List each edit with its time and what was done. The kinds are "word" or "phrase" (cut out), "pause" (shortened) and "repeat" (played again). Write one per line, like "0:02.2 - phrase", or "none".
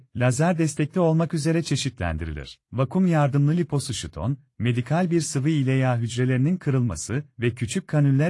0:02.6 - pause